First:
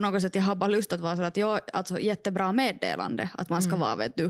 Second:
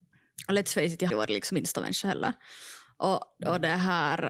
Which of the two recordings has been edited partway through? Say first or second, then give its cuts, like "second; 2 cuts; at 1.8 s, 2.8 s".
second; 2 cuts; at 1.1 s, 1.5 s